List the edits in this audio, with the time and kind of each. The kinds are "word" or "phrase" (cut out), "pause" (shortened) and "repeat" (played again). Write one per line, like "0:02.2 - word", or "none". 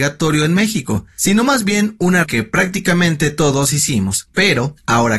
0:02.2 - word